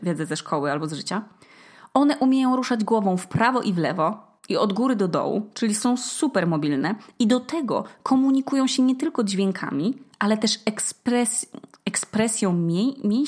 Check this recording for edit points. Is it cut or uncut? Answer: uncut